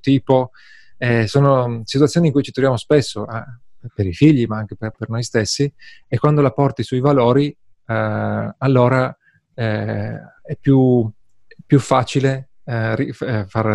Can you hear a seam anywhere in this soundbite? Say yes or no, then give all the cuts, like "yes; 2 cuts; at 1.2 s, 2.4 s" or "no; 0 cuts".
no; 0 cuts